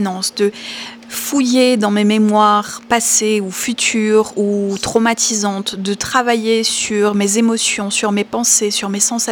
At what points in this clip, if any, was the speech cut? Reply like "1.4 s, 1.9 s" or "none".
none